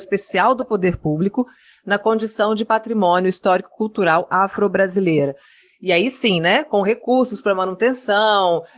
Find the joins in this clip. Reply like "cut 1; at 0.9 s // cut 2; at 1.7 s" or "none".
none